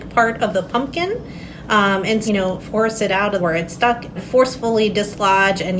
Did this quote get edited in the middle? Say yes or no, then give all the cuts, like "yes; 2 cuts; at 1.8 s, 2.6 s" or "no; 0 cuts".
yes; 4 cuts; at 2.3 s, 2.6 s, 3.4 s, 4.2 s